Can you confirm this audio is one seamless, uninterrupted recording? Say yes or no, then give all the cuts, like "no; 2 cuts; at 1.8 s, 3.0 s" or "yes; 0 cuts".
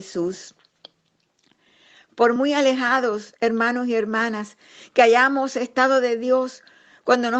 yes; 0 cuts